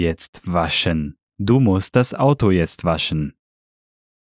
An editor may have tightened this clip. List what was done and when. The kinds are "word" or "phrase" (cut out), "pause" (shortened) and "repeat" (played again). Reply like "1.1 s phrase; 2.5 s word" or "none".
1.3 s pause